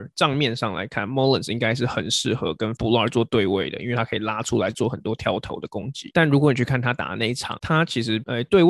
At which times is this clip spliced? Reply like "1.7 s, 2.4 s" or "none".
none